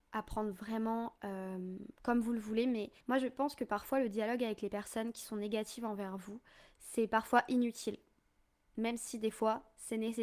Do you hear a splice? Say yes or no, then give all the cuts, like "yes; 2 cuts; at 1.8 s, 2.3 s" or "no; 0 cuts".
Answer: yes; 2 cuts; at 1.9 s, 3.0 s